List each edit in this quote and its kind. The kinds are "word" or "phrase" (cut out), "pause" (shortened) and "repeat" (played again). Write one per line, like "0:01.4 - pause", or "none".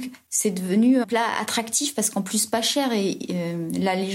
0:01.0 - phrase